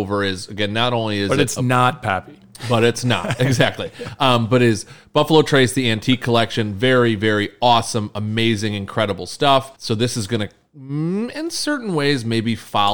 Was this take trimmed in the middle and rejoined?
yes; 1 cut; at 9.7 s

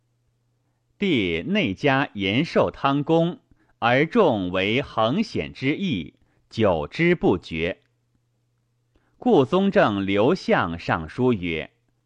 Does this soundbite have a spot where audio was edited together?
no; 0 cuts

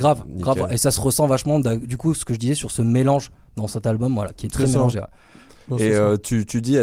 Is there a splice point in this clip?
no; 0 cuts

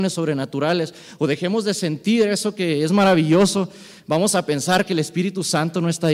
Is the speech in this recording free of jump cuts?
yes; 0 cuts

